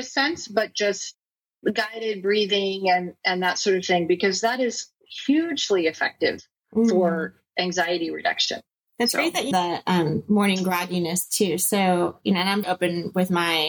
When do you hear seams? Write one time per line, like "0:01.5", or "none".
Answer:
0:09.5
0:12.6